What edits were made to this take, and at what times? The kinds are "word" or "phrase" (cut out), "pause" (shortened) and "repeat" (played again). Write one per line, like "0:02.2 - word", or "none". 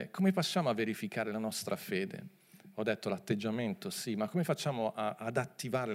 none